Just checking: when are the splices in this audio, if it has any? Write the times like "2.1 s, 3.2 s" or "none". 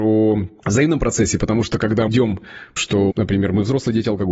2.1 s, 2.8 s, 3.1 s